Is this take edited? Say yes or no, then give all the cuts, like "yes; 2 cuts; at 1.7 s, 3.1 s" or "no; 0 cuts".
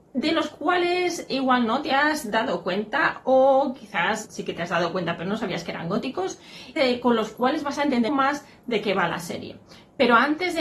yes; 3 cuts; at 4.3 s, 6.8 s, 8.1 s